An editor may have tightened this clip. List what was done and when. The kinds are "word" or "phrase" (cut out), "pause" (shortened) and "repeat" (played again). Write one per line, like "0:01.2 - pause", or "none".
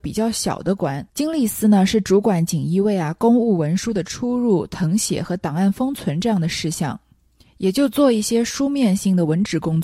0:01.1 - pause